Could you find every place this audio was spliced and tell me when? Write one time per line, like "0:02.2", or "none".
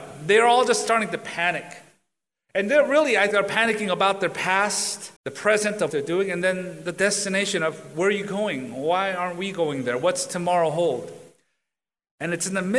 0:03.3
0:05.2
0:05.9

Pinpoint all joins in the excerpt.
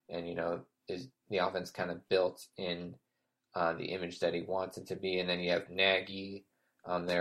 0:05.7

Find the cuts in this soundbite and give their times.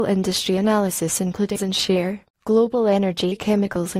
0:01.6

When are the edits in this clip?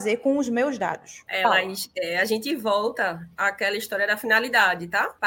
none

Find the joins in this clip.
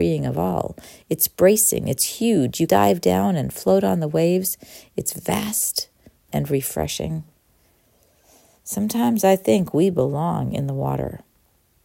0:02.7

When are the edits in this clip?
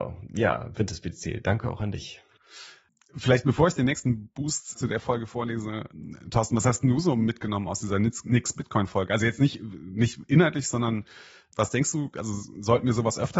0:04.7

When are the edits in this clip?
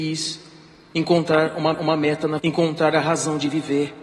0:01.7
0:02.4

